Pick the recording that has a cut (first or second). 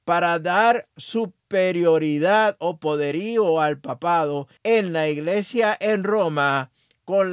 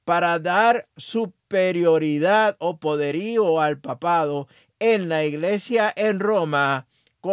first